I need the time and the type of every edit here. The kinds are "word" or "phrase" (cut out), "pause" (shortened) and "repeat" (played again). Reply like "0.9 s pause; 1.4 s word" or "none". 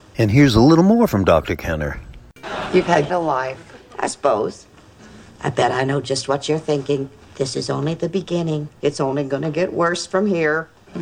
3.1 s word